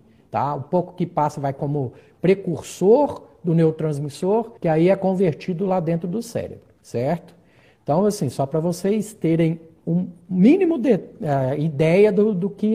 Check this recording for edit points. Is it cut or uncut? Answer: cut